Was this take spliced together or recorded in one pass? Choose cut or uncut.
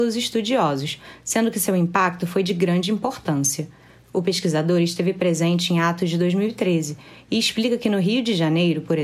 uncut